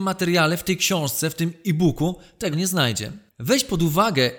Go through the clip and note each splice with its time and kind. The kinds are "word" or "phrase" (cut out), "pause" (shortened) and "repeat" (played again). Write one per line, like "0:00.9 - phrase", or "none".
0:02.5 - word